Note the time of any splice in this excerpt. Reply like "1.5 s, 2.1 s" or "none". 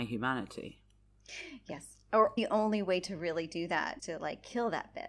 2.4 s, 4.0 s